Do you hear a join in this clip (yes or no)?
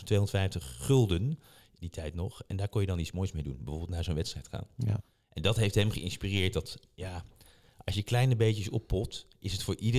no